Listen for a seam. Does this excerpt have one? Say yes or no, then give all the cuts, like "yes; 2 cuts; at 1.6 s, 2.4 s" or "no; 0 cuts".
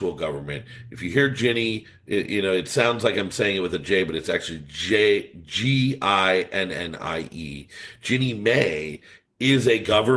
no; 0 cuts